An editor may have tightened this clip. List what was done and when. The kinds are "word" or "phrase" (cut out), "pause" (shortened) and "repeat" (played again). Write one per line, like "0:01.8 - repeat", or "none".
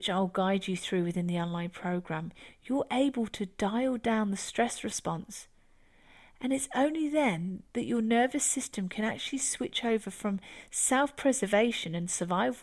none

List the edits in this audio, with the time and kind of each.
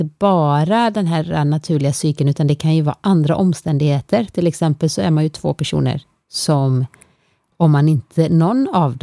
none

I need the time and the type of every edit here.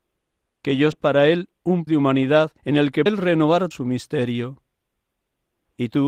0:00.9 - word
0:01.9 - word
0:02.6 - pause
0:03.1 - word
0:03.7 - word

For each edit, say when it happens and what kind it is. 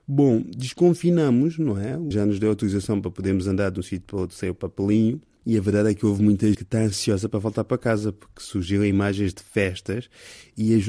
0:02.1 - word
0:06.5 - word

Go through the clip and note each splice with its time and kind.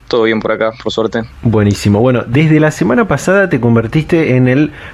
0:01.3 - pause

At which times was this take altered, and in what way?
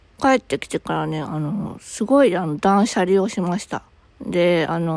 0:04.0 - pause

